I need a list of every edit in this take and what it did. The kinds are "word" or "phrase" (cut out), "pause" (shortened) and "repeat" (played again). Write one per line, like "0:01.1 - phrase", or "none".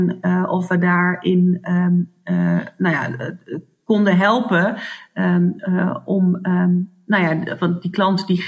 none

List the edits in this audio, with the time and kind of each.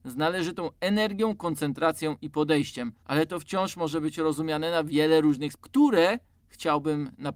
0:03.0 - pause
0:05.5 - word

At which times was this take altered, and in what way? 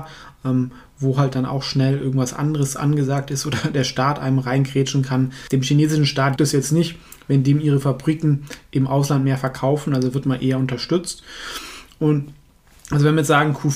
0:06.4 - word

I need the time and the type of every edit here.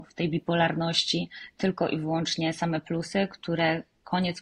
none

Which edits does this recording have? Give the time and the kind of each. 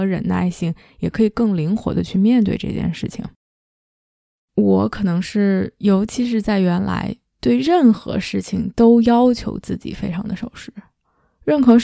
none

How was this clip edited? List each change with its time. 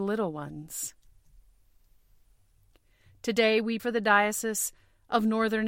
0:03.8 - word

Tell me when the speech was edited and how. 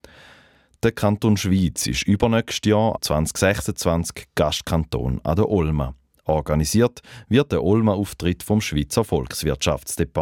0:03.0 - word

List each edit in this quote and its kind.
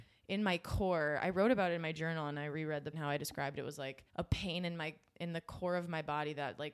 0:02.9 - phrase
0:04.1 - pause

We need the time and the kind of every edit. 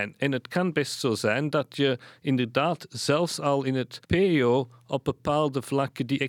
0:04.0 - pause

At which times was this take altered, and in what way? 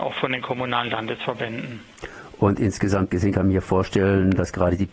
none

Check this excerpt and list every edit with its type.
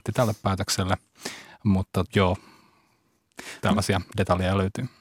0:02.1 - word

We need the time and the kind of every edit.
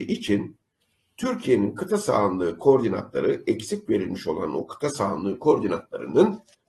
none

